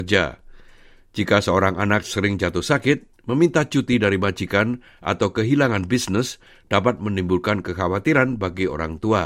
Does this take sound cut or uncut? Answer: uncut